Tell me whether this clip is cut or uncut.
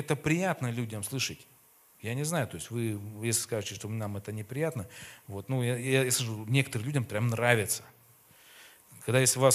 cut